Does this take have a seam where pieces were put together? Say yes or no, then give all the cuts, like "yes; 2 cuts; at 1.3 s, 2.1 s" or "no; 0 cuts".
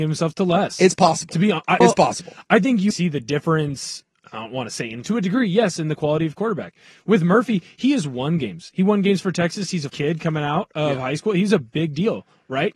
yes; 4 cuts; at 1.8 s, 2.9 s, 5.0 s, 9.9 s